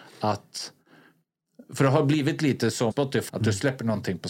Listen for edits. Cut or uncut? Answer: cut